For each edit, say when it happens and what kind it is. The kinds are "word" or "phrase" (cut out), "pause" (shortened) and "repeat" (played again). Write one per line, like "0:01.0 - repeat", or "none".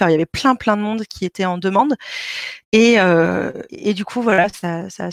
0:03.7 - pause

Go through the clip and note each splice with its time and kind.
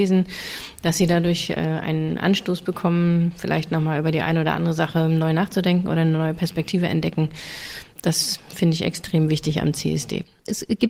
0:07.9 - pause

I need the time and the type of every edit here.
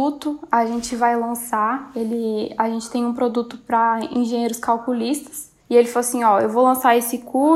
0:05.6 - pause

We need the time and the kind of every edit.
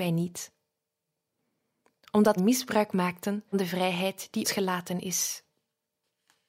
0:02.4 - word
0:03.5 - word
0:04.4 - word

